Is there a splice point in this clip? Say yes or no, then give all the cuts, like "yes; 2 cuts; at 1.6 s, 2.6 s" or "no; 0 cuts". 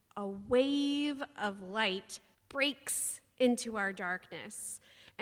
yes; 1 cut; at 2.3 s